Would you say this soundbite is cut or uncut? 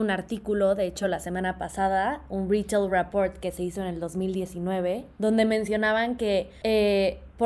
uncut